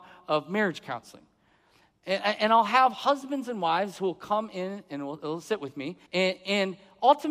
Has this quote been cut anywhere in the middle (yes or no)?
yes